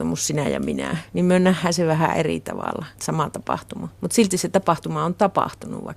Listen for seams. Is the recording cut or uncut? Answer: cut